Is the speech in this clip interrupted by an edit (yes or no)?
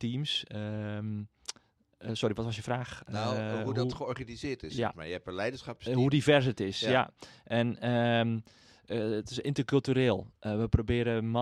no